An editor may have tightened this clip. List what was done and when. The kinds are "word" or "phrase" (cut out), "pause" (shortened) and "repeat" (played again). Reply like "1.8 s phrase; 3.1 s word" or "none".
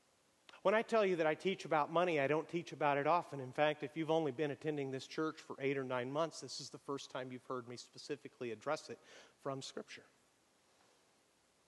none